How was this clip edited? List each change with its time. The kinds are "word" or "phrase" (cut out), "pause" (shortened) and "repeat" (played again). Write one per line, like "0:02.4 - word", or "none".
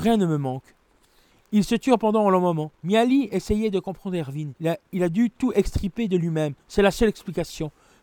0:02.7 - pause
0:04.6 - pause
0:06.6 - pause